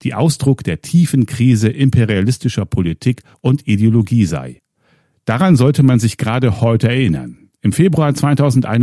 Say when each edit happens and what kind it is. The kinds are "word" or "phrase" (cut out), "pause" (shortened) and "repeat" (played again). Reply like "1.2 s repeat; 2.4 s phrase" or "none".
none